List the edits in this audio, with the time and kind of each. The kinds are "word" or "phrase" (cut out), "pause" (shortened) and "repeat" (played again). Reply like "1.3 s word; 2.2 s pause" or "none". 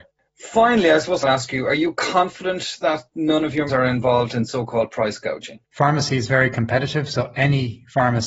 1.2 s phrase; 3.7 s word; 5.6 s pause